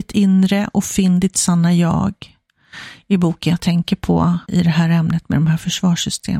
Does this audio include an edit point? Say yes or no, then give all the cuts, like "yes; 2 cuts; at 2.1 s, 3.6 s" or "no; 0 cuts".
yes; 1 cut; at 4.4 s